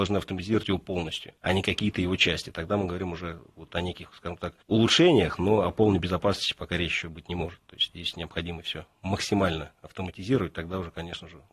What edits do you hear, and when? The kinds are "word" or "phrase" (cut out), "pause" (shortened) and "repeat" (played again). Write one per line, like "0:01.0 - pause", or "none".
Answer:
0:01.4 - pause
0:04.6 - pause

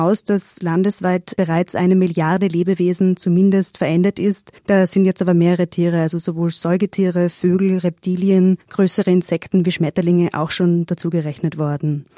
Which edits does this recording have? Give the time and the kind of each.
0:04.6 - pause
0:08.6 - pause

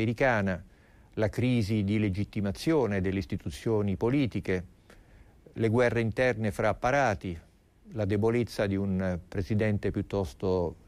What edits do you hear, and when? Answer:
none

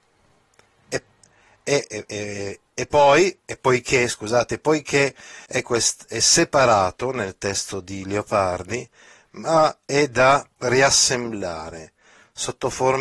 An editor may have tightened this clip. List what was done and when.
0:05.4 - pause
0:10.5 - pause

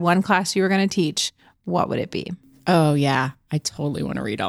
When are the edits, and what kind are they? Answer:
none

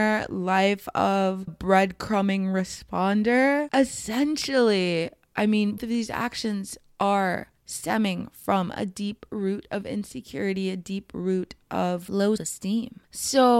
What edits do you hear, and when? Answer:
0:01.5 - word
0:05.8 - word
0:07.6 - pause
0:12.4 - word

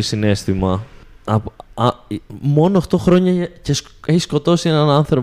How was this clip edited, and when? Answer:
none

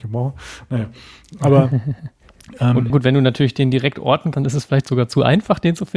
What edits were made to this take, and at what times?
0:02.9 - word
0:04.3 - word

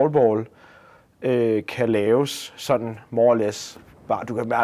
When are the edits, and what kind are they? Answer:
none

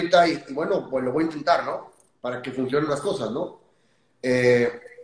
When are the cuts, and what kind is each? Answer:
0:02.9 - word

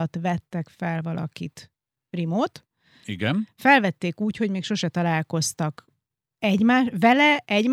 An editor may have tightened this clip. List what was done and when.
none

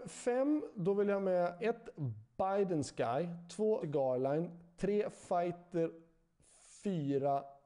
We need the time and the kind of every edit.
0:01.6 - word
0:03.8 - word

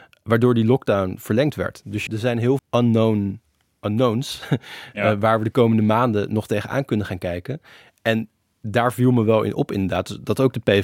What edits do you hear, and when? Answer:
0:02.1 - word
0:02.6 - word

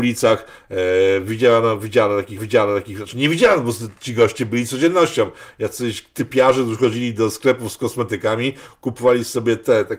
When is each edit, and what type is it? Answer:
0:02.4 - repeat

